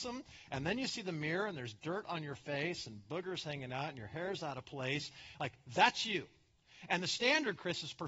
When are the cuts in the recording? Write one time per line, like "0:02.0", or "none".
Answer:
none